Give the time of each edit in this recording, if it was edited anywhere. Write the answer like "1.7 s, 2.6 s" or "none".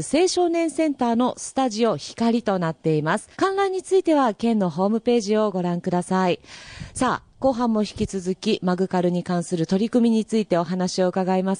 3.3 s